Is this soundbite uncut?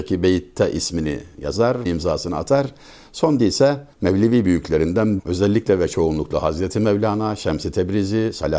no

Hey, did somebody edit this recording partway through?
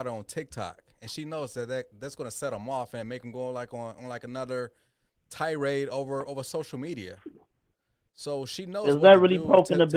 no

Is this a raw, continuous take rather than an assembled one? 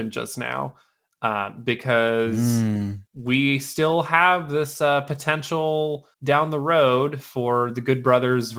no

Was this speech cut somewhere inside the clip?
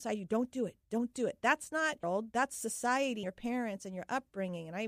yes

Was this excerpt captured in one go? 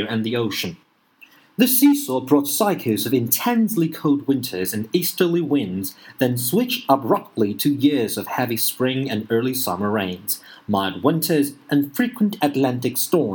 yes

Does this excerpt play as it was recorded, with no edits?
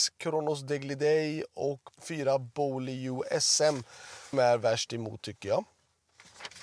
no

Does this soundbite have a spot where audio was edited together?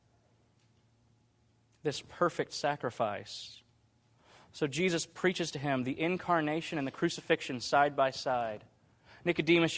no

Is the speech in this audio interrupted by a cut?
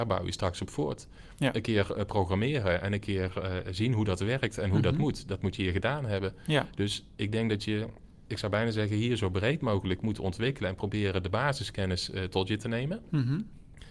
no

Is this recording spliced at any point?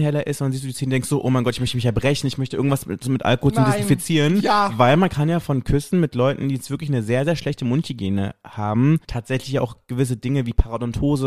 yes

